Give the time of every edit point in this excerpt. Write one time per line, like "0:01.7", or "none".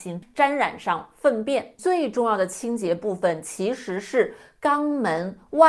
none